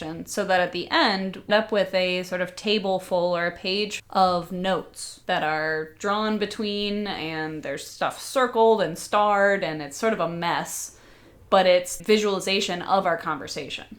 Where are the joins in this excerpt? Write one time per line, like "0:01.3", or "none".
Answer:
0:01.5
0:04.0
0:05.2
0:12.0